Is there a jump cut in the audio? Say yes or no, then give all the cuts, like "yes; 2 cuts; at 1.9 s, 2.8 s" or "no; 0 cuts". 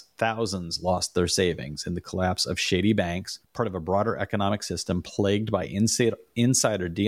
yes; 1 cut; at 3.4 s